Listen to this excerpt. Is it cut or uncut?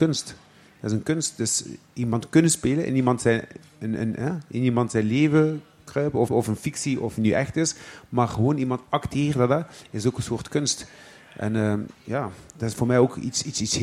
cut